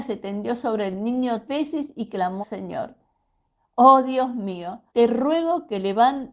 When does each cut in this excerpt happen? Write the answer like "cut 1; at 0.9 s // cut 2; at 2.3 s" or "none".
cut 1; at 1.5 s // cut 2; at 2.4 s // cut 3; at 4.9 s